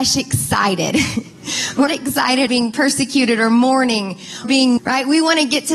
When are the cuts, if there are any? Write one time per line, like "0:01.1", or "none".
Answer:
0:01.9
0:02.5
0:04.4
0:04.8